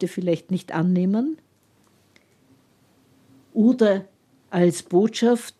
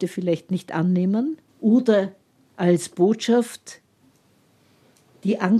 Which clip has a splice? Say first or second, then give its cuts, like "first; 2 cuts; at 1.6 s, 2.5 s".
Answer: second; 1 cut; at 1.5 s